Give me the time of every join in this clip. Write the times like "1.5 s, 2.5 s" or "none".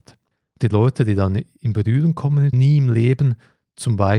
2.5 s